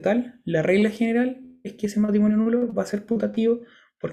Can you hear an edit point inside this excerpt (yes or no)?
no